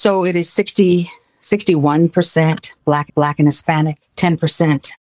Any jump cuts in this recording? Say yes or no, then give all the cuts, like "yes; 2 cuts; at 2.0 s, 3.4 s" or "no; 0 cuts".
yes; 2 cuts; at 3.1 s, 4.1 s